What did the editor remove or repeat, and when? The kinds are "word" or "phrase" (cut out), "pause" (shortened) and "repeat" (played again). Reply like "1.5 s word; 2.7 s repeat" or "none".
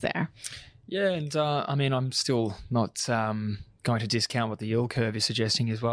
none